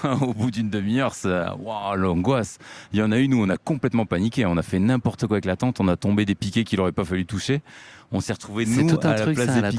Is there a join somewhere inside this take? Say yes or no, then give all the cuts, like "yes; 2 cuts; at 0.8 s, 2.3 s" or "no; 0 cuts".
no; 0 cuts